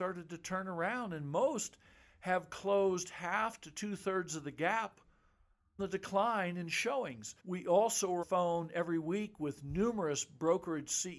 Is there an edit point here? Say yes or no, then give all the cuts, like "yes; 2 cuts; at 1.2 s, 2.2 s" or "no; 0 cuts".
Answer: yes; 3 cuts; at 5.8 s, 7.4 s, 8.2 s